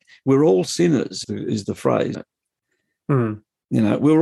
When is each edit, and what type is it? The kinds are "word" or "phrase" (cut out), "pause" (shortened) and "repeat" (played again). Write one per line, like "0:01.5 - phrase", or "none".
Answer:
0:01.2 - word
0:02.1 - word